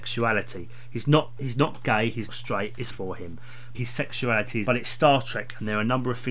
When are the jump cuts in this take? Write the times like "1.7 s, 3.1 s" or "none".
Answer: 1.4 s, 2.3 s, 2.9 s, 3.7 s, 4.6 s